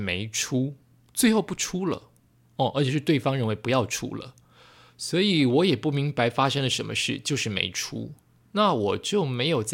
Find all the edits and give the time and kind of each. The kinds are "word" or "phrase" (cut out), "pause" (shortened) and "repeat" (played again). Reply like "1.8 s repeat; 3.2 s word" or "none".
none